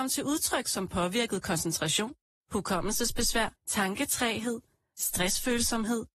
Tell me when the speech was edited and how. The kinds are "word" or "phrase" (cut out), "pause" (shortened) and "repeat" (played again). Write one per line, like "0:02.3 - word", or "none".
0:03.6 - pause